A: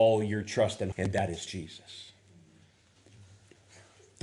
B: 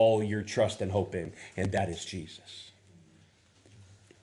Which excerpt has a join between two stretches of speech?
A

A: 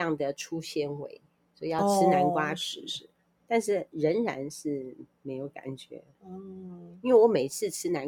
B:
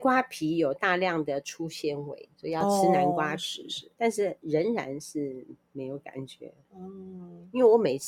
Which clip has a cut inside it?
B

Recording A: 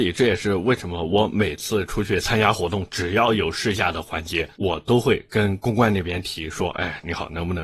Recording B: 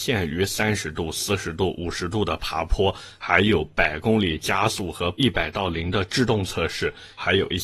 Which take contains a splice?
A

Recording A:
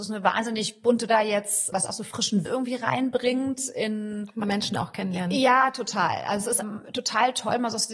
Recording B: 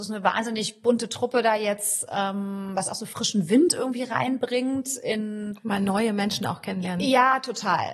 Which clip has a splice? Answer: A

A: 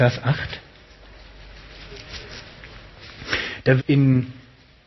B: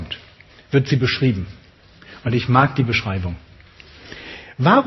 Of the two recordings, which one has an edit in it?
A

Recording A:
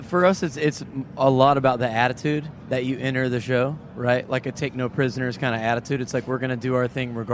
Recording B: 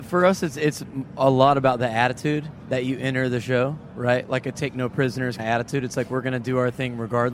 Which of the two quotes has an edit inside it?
B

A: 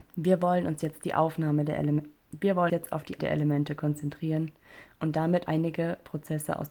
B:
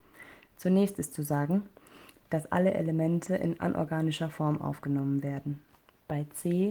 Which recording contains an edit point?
A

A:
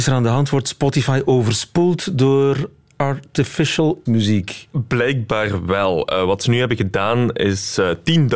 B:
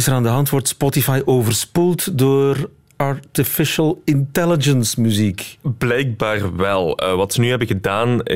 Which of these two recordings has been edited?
A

